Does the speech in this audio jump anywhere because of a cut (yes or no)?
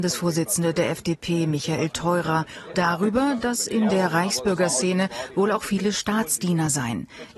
yes